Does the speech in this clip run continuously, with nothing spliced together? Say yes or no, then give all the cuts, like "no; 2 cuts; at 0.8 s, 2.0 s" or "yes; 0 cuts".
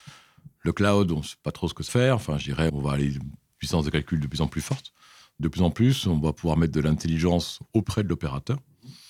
no; 3 cuts; at 1.9 s, 2.7 s, 7.8 s